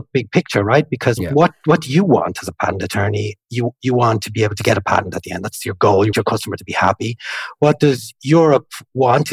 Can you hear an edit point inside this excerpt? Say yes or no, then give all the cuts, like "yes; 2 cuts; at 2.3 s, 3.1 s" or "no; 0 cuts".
yes; 2 cuts; at 1.2 s, 6.1 s